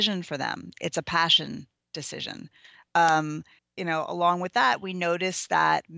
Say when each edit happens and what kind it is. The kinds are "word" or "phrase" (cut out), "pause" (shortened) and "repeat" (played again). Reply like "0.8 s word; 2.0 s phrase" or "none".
3.6 s word